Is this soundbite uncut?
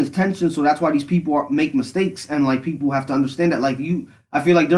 yes; 0 cuts

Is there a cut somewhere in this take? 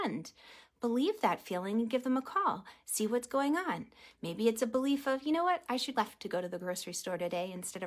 yes; 1 cut; at 5.9 s

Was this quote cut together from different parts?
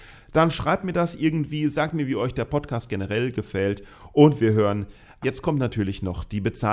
yes; 1 cut; at 5.2 s

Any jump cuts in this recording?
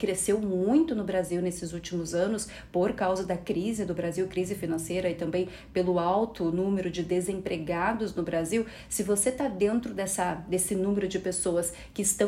no; 0 cuts

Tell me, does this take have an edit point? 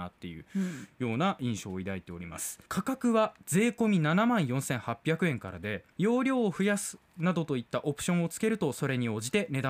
yes; 2 cuts; at 2.7 s, 5.9 s

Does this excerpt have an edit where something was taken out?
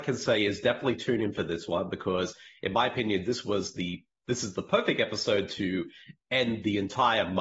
no; 0 cuts

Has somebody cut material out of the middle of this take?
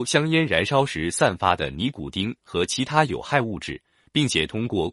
no; 0 cuts

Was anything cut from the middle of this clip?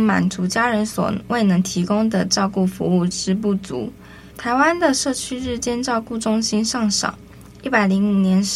yes; 1 cut; at 4.3 s

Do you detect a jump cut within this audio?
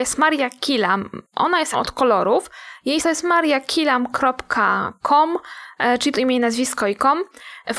yes; 3 cuts; at 1.7 s, 3.0 s, 6.1 s

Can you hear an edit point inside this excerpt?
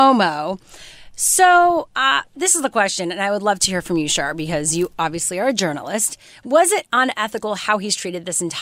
no; 0 cuts

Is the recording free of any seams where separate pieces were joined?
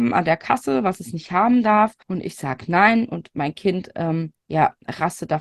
no; 2 cuts; at 2.0 s, 4.3 s

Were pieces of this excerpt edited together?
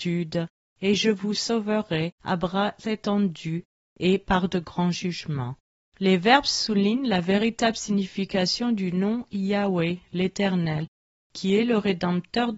no; 0 cuts

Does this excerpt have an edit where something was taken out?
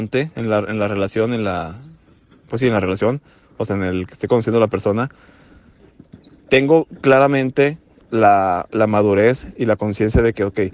no; 0 cuts

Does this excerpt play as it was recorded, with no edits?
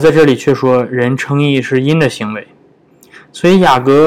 yes; 0 cuts

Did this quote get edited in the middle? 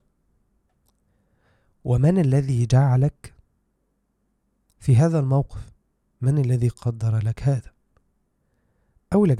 no; 0 cuts

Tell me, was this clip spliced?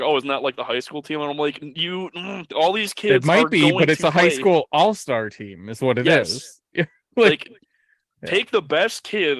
no; 0 cuts

